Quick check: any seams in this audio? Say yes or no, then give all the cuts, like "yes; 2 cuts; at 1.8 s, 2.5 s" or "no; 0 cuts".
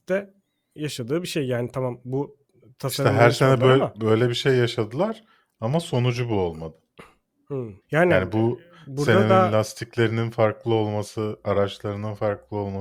yes; 1 cut; at 7.8 s